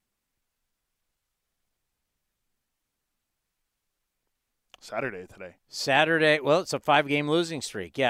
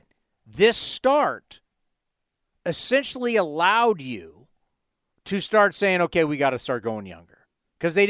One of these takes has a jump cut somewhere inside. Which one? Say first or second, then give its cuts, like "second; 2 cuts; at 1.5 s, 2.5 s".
first; 1 cut; at 5.6 s